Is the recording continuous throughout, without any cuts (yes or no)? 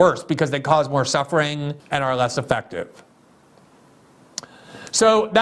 no